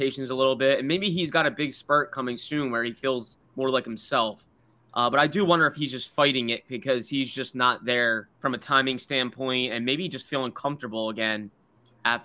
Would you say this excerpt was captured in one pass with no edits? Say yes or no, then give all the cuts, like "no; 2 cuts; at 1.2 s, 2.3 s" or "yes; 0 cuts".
no; 2 cuts; at 3.5 s, 8.3 s